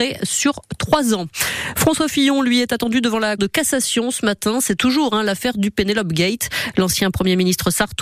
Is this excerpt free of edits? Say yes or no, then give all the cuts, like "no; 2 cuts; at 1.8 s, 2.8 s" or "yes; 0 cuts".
no; 1 cut; at 3.4 s